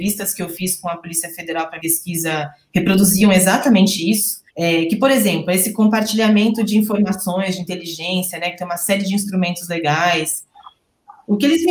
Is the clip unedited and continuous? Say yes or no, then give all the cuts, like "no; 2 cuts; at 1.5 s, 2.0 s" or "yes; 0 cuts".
no; 2 cuts; at 1.8 s, 4.5 s